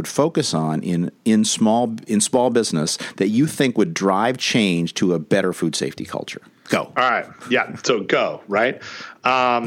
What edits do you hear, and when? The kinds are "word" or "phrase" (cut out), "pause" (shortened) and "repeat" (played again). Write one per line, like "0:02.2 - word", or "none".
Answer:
none